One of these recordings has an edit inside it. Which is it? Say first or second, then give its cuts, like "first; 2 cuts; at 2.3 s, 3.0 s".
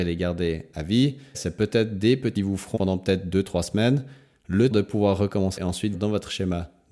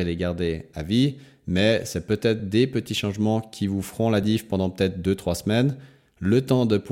first; 6 cuts; at 1.3 s, 2.4 s, 2.8 s, 4.7 s, 5.6 s, 5.9 s